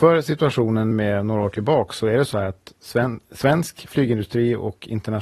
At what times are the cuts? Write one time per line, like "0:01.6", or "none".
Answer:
0:00.9